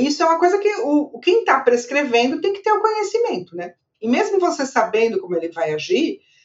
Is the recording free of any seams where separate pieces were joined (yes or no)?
yes